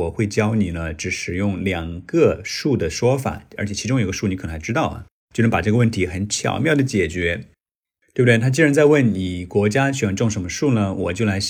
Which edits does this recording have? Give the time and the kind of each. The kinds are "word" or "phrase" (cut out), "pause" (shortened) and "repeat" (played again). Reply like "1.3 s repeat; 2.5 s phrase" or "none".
none